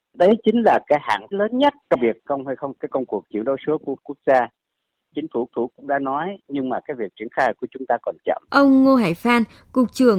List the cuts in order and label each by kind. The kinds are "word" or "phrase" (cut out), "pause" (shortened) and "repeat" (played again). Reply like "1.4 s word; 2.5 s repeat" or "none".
1.3 s word; 2.3 s phrase; 2.7 s phrase; 5.5 s repeat; 8.5 s pause